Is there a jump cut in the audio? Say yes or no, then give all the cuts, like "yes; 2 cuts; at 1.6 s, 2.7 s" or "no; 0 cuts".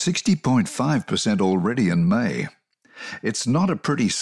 no; 0 cuts